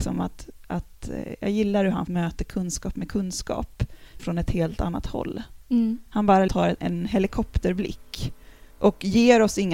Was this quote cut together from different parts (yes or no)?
yes